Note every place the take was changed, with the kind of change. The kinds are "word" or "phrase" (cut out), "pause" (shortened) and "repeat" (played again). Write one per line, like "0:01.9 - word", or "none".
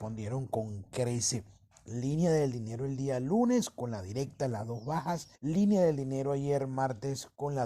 0:05.4 - pause